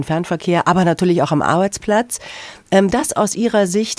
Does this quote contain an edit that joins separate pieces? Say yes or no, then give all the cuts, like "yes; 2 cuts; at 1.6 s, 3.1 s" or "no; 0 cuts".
yes; 1 cut; at 2.9 s